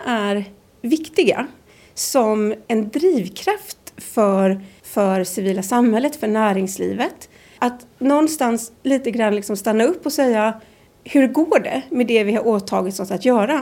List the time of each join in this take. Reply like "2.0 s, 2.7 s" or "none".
4.8 s